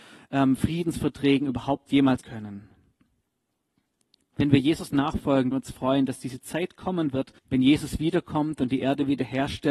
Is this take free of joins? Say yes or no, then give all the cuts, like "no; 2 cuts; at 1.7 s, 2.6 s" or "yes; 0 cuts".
no; 3 cuts; at 2.2 s, 5.5 s, 7.4 s